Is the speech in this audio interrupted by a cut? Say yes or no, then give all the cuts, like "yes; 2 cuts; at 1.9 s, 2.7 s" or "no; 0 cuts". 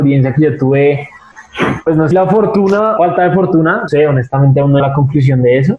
yes; 4 cuts; at 2.1 s, 3.0 s, 3.9 s, 4.8 s